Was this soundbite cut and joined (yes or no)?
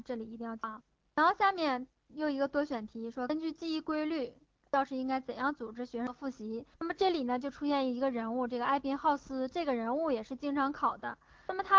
yes